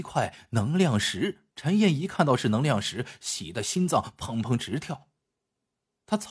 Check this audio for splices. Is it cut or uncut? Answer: cut